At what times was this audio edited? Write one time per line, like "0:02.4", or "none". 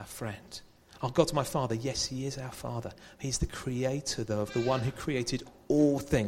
none